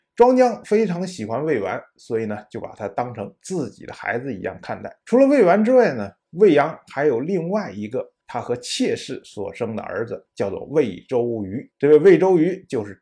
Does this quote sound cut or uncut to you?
cut